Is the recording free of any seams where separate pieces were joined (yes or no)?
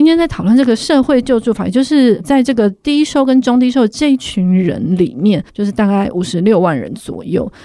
no